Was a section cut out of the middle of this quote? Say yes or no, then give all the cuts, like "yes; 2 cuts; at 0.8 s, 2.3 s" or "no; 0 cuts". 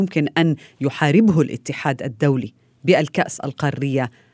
no; 0 cuts